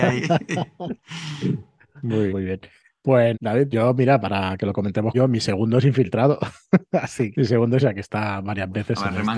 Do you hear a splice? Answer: yes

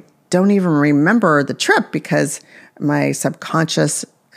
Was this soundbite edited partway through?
no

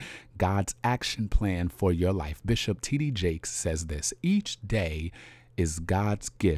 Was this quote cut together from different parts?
no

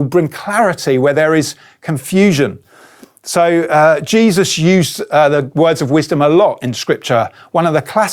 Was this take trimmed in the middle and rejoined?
no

